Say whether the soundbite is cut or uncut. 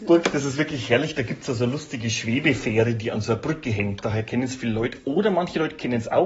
uncut